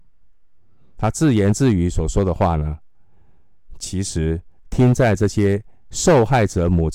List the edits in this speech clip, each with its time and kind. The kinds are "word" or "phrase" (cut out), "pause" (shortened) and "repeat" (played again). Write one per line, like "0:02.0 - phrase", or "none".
0:04.6 - pause